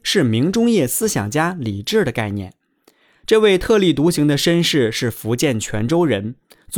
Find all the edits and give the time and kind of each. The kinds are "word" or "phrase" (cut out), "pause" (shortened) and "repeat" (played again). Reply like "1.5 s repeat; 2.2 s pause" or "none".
none